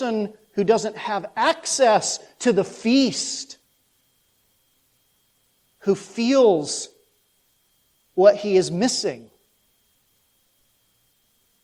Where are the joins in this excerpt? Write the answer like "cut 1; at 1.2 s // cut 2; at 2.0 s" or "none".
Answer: none